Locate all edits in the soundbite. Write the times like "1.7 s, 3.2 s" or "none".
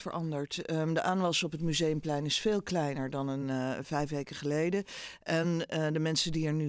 none